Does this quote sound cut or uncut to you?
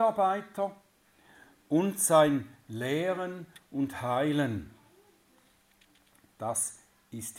uncut